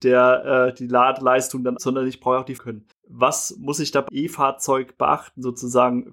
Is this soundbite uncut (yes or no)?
no